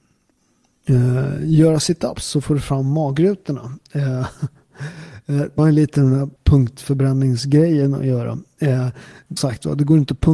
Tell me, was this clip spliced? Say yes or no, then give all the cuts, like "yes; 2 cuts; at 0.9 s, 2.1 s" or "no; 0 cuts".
yes; 3 cuts; at 5.6 s, 6.4 s, 9.4 s